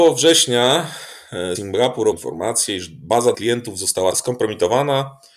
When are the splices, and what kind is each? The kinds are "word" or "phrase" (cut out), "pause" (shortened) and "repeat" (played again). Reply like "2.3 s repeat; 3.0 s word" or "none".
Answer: 1.5 s word; 2.1 s word; 3.3 s word; 4.1 s word